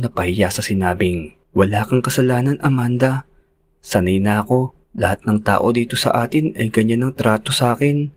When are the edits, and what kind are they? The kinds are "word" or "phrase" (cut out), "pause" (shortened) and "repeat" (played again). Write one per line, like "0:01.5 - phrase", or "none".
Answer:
0:01.4 - pause
0:04.8 - pause